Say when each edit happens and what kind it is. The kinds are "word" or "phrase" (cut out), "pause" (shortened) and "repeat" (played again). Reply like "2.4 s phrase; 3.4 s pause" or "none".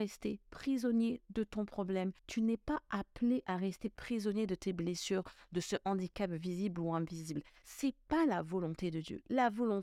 2.2 s pause